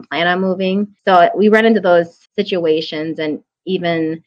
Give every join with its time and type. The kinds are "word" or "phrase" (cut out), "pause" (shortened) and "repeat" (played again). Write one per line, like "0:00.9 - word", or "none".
0:01.0 - pause
0:02.3 - pause